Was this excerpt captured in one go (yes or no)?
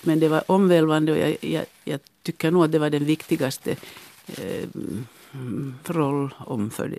yes